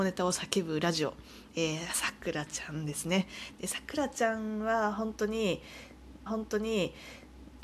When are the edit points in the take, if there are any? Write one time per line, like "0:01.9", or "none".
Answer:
0:06.3

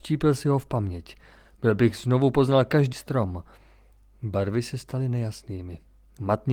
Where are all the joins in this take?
0:02.9

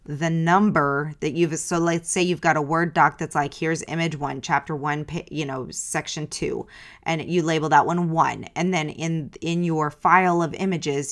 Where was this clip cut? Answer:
none

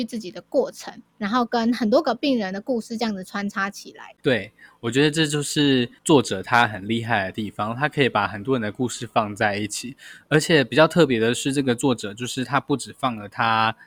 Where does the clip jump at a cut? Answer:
0:01.1
0:04.2
0:06.0

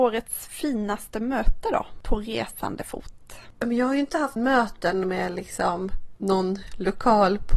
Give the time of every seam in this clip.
0:04.4

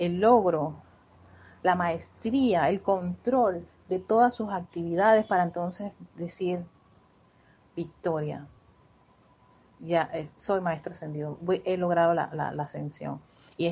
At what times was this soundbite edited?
none

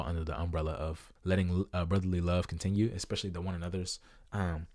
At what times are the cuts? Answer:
0:01.2

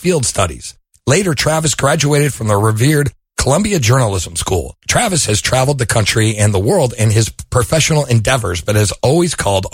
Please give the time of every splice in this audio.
none

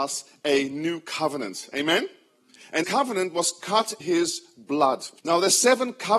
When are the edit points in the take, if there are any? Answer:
0:02.8
0:04.0
0:05.2

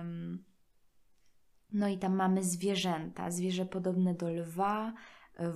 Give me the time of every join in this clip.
none

